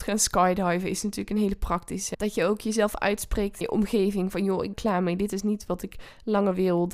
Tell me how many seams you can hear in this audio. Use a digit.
3